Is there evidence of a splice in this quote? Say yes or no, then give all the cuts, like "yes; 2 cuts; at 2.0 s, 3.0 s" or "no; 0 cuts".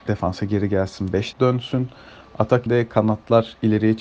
yes; 2 cuts; at 1.3 s, 2.7 s